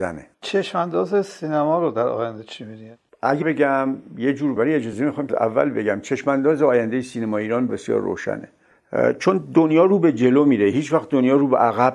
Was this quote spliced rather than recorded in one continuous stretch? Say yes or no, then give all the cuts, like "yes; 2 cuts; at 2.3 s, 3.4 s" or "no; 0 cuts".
yes; 4 cuts; at 3.4 s, 4.6 s, 5.3 s, 7.7 s